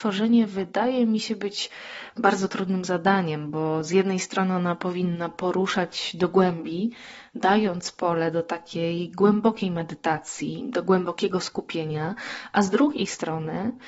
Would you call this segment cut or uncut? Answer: uncut